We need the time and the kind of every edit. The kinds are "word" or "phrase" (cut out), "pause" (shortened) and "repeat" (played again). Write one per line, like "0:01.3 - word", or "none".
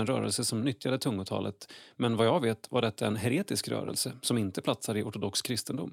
none